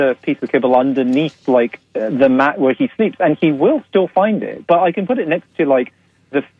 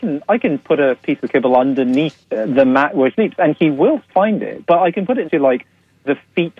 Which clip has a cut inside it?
second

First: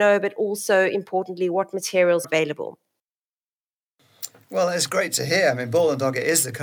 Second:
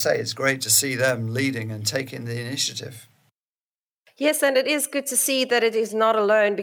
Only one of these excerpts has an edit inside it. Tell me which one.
first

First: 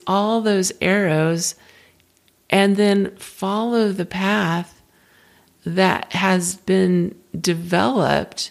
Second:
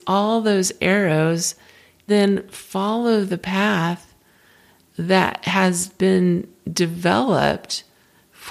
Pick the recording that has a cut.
second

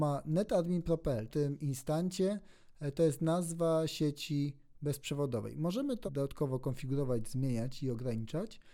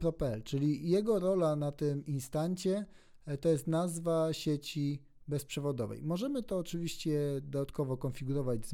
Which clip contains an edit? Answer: first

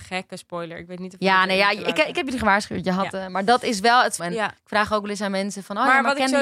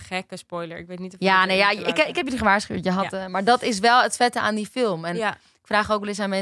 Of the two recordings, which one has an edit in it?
first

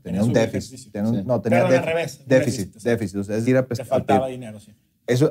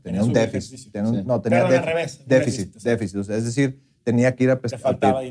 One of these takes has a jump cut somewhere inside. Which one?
first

